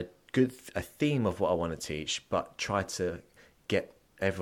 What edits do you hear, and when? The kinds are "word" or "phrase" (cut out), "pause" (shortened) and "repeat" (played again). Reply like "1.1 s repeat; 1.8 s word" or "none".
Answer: none